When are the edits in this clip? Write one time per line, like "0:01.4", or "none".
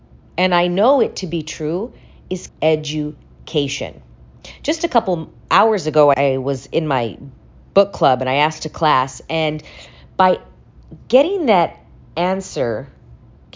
0:02.5
0:05.4
0:06.1